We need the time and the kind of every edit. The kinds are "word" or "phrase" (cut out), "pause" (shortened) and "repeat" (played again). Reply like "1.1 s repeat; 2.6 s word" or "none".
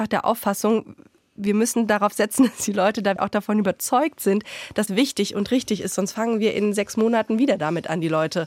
3.2 s word; 4.9 s word